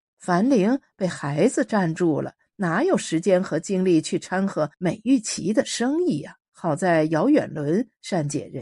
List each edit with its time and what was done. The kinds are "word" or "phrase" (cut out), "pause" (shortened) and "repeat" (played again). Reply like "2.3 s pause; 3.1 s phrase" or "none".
4.7 s pause; 6.5 s pause